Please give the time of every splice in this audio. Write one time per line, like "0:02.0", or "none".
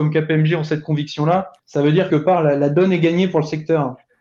0:01.6
0:02.1